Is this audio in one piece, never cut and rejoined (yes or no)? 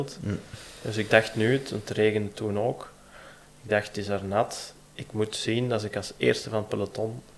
yes